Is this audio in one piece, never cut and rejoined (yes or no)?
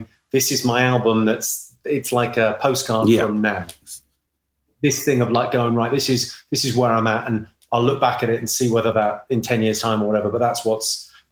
yes